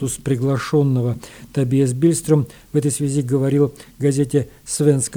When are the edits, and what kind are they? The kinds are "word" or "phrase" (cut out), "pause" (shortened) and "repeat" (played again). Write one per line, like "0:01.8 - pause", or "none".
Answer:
none